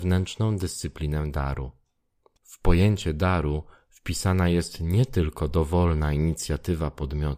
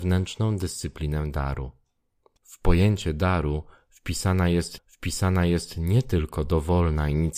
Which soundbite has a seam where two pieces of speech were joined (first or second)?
second